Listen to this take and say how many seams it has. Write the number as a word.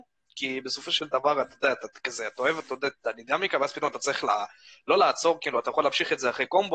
zero